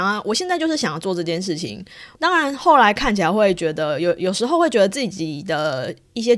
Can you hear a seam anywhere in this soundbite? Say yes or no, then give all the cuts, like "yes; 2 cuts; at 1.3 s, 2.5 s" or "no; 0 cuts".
yes; 1 cut; at 2.1 s